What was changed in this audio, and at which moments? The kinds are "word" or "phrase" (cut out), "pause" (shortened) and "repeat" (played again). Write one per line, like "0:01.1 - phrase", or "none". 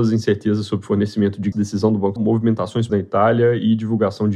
0:01.5 - word
0:02.2 - word
0:02.9 - word